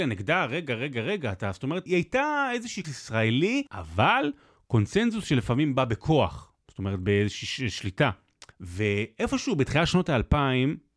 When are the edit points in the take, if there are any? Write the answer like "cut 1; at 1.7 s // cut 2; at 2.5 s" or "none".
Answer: cut 1; at 1.9 s // cut 2; at 2.8 s // cut 3; at 3.7 s // cut 4; at 8.5 s